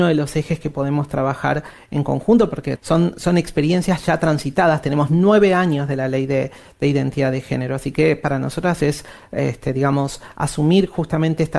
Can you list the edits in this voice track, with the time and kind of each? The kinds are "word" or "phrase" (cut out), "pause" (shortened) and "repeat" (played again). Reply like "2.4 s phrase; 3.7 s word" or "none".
2.8 s word